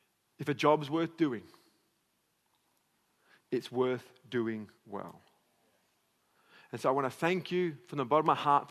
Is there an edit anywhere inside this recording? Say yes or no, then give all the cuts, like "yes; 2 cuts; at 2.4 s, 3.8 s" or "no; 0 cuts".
yes; 1 cut; at 4.8 s